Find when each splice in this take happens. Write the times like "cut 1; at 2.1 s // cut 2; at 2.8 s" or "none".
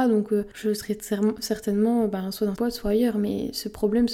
cut 1; at 2.6 s